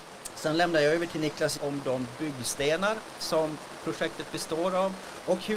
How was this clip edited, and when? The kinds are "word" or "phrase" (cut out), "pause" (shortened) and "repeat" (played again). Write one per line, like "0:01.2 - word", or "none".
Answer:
0:01.6 - phrase